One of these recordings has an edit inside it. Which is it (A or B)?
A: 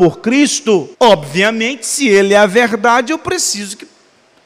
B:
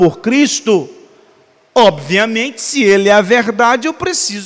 A